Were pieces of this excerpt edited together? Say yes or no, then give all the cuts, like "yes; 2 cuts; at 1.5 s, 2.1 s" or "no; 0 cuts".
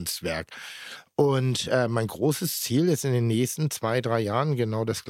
no; 0 cuts